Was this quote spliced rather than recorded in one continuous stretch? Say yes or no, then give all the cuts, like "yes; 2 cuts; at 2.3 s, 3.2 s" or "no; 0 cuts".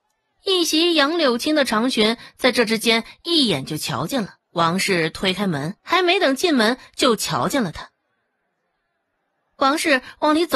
yes; 2 cuts; at 4.4 s, 5.8 s